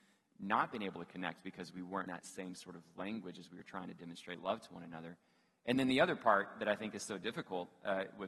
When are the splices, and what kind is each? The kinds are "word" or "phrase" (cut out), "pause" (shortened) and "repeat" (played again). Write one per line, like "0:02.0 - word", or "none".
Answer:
0:02.1 - word